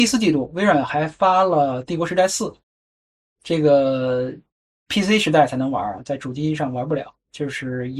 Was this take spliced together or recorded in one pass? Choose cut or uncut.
uncut